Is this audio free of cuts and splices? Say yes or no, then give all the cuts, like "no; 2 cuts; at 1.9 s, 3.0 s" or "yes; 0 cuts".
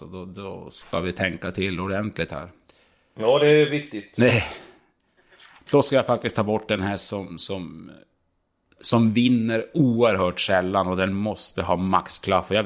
yes; 0 cuts